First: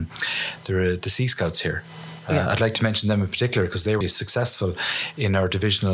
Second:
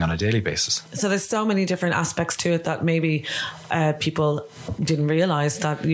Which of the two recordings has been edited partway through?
first; 1 cut; at 4.0 s

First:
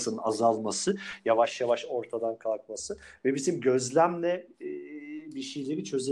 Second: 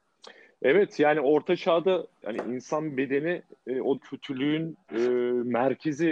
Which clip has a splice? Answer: second; 2 cuts; at 2.2 s, 4.0 s

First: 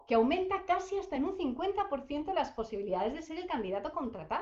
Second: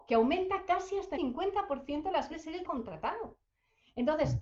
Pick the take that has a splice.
second; 3 cuts; at 1.2 s, 2.3 s, 2.6 s

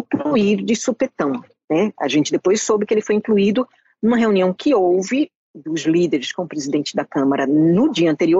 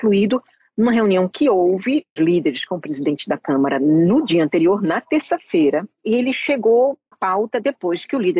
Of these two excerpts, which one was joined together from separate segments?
second; 2 cuts; at 2.2 s, 7.1 s

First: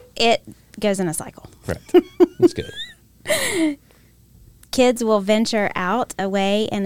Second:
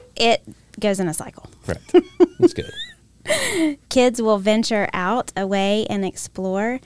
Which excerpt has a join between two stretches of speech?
second; 1 cut; at 3.8 s

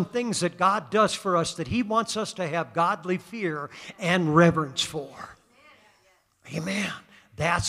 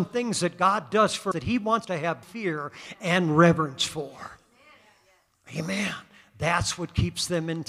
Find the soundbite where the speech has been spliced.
second; 3 cuts; at 1.3 s, 1.8 s, 2.2 s

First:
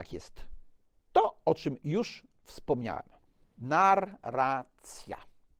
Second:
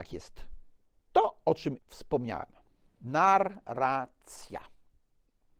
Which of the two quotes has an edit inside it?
second; 1 cut; at 1.8 s

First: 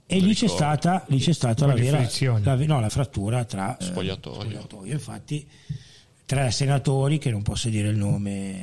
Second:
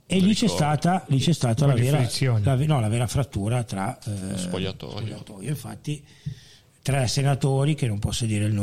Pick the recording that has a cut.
first; 2 cuts; at 2.9 s, 3.8 s

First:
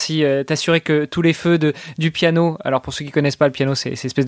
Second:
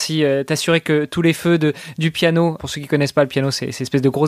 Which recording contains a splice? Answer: second; 1 cut; at 2.6 s

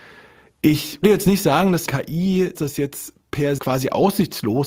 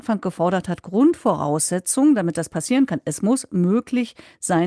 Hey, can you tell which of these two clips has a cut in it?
first; 3 cuts; at 1.0 s, 2.5 s, 3.6 s

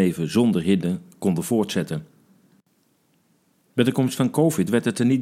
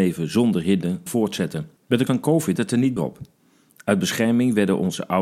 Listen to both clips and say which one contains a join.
second; 5 cuts; at 1.1 s, 1.8 s, 2.1 s, 2.6 s, 3.0 s

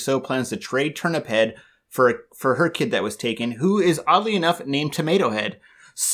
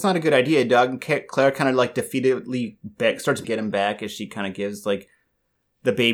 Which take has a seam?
second; 1 cut; at 3.4 s

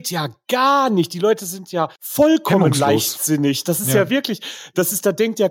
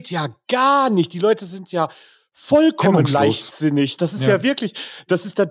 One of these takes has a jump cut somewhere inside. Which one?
first; 1 cut; at 2.0 s

